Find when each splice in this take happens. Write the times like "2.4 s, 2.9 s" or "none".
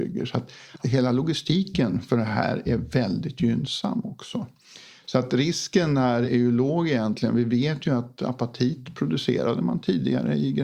none